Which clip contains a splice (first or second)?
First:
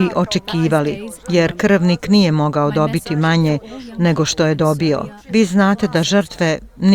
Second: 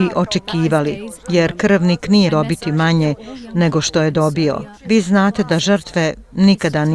second